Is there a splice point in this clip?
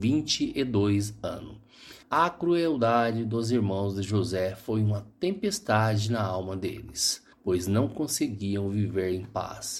yes; 2 cuts; at 2.0 s, 7.3 s

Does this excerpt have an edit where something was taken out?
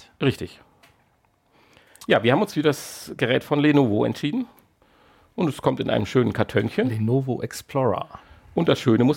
no; 0 cuts

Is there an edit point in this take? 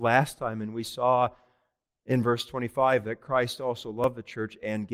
no; 0 cuts

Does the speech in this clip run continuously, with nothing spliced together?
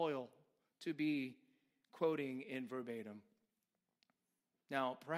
yes; 0 cuts

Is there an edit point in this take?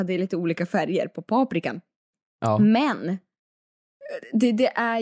no; 0 cuts

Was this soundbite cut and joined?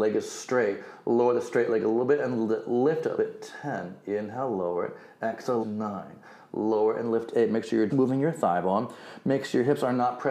yes; 3 cuts; at 3.2 s, 5.6 s, 7.9 s

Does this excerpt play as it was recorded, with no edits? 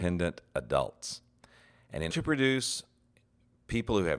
no; 1 cut; at 2.1 s

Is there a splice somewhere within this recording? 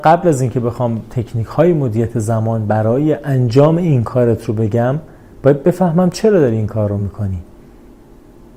no; 0 cuts

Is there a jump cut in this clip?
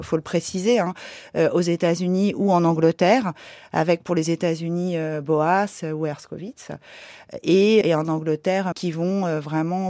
yes; 2 cuts; at 7.8 s, 8.7 s

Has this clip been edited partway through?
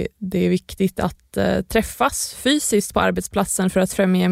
no; 0 cuts

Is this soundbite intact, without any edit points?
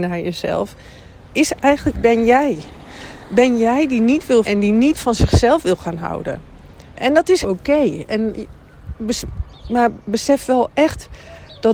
no; 5 cuts; at 1.2 s, 1.9 s, 4.4 s, 6.9 s, 7.4 s

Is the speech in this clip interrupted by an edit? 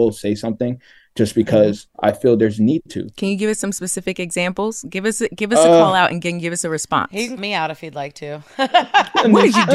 yes; 2 cuts; at 1.9 s, 7.4 s

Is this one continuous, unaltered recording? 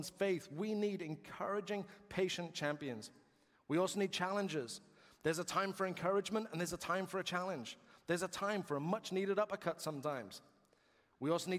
yes; 0 cuts

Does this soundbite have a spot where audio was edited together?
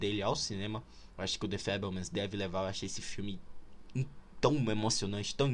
no; 0 cuts

